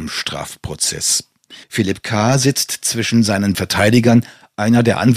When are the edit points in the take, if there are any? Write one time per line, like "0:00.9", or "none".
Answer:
0:01.6
0:03.5

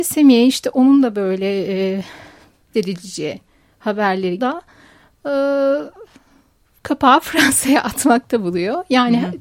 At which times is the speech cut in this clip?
0:02.7
0:04.4
0:06.7

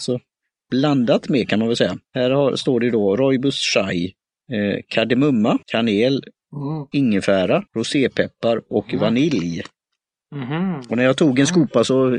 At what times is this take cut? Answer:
0:02.0
0:04.2
0:05.6
0:07.7
0:10.0

